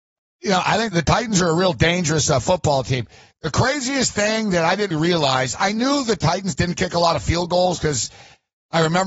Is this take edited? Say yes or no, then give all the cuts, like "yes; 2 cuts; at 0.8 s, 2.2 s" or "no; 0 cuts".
yes; 2 cuts; at 0.9 s, 4.9 s